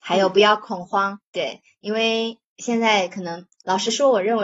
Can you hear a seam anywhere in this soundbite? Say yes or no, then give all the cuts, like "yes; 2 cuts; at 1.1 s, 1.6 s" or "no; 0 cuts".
yes; 2 cuts; at 1.3 s, 3.5 s